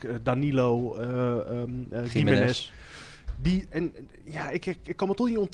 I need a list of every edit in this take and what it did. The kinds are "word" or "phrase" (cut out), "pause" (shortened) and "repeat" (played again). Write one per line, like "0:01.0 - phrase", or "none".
none